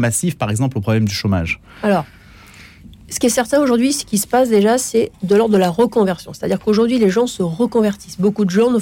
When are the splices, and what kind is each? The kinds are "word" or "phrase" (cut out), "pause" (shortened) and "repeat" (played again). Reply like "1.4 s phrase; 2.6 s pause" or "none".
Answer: none